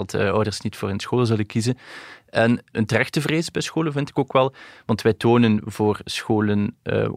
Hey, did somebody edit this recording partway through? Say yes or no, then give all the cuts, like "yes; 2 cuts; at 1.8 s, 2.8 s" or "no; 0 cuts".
no; 0 cuts